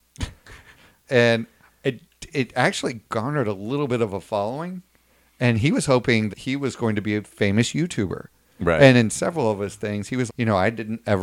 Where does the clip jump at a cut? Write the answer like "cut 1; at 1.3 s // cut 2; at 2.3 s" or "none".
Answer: cut 1; at 1.0 s // cut 2; at 6.3 s // cut 3; at 10.3 s